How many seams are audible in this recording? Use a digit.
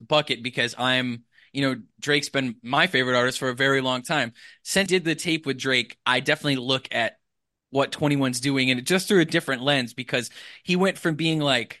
1